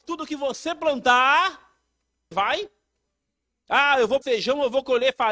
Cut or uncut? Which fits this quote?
cut